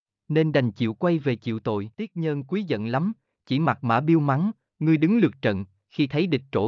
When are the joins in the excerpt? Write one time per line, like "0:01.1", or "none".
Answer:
none